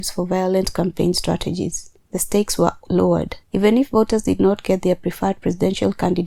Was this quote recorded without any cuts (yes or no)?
no